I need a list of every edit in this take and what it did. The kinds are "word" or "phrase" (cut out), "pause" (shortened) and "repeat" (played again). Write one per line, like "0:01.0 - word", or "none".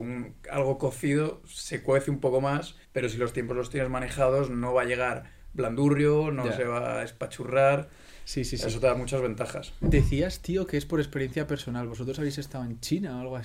0:02.8 - pause